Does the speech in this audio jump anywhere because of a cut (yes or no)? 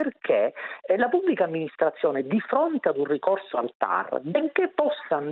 no